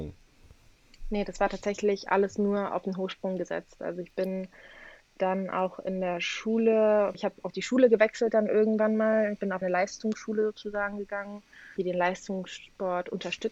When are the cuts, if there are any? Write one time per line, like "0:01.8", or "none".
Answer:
0:07.1
0:09.6
0:11.8